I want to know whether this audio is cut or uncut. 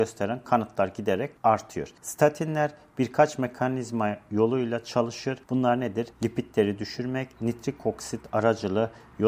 cut